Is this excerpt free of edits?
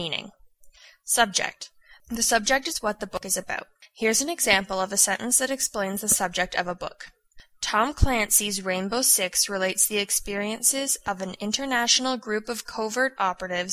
yes; 0 cuts

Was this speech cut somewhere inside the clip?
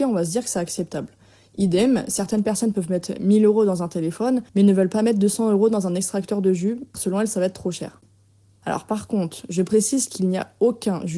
yes; 1 cut; at 6.9 s

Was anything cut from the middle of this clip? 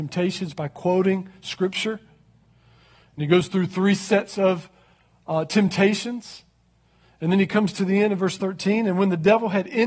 no; 0 cuts

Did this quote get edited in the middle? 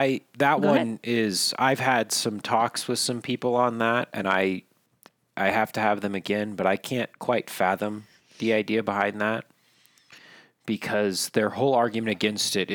no; 0 cuts

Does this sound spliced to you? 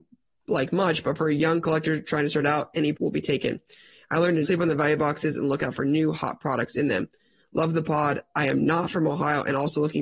yes; 2 cuts; at 2.9 s, 4.4 s

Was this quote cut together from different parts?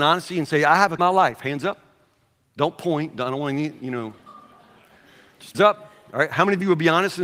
yes; 2 cuts; at 1.0 s, 5.5 s

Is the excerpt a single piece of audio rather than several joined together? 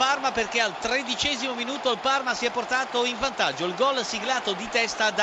yes; 0 cuts

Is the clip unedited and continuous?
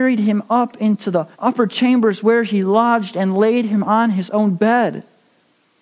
no; 1 cut; at 1.3 s

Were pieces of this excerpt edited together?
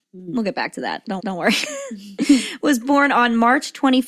yes; 1 cut; at 1.2 s

